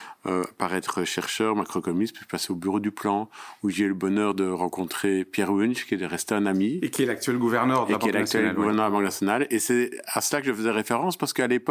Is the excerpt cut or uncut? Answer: uncut